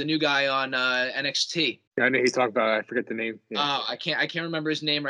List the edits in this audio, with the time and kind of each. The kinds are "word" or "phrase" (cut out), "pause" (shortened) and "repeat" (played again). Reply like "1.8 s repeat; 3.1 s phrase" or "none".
1.9 s pause